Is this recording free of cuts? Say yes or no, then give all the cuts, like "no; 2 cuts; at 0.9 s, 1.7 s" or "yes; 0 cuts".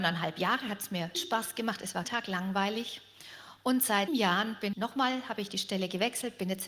no; 4 cuts; at 1.1 s, 2.0 s, 4.1 s, 4.7 s